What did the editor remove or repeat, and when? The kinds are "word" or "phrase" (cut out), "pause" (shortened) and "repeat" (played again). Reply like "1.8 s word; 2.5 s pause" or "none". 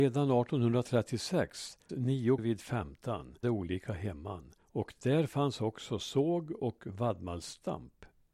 1.9 s word; 2.4 s word; 3.4 s word; 4.6 s pause